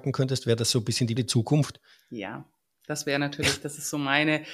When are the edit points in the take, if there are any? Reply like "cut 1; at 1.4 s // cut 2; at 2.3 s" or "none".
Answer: cut 1; at 1.2 s